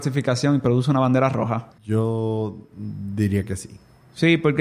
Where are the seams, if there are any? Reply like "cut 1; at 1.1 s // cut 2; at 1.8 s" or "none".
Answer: cut 1; at 1.7 s